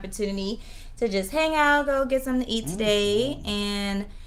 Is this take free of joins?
yes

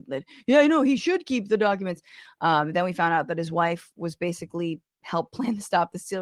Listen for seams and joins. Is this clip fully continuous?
yes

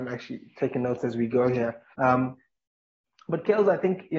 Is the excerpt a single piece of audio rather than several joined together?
no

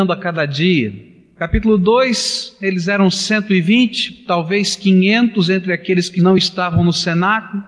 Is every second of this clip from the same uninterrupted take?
yes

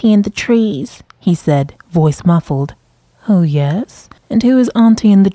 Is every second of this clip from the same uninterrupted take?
no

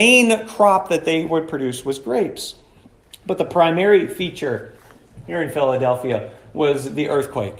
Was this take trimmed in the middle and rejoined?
no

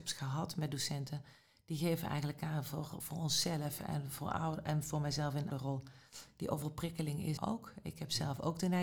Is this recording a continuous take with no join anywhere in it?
no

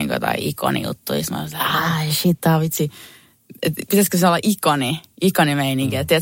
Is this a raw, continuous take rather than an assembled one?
yes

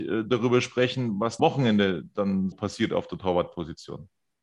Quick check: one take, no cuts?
no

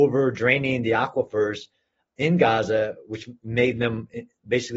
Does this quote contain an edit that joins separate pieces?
no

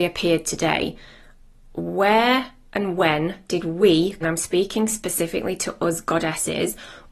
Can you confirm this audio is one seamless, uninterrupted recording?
no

